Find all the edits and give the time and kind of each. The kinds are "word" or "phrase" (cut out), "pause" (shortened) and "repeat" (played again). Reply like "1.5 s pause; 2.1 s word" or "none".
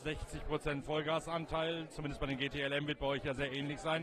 none